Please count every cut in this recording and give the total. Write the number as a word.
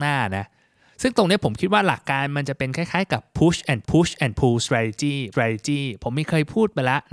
two